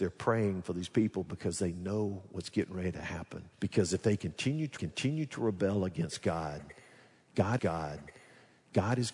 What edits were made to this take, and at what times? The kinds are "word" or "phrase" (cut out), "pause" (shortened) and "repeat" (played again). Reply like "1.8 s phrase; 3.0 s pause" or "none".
3.5 s pause; 4.8 s repeat; 7.6 s repeat